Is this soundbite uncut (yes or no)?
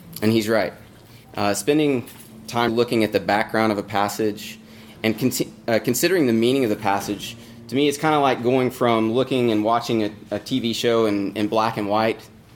no